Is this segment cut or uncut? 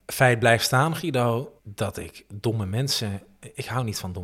cut